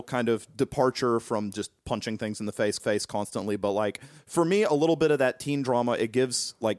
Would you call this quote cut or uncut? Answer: cut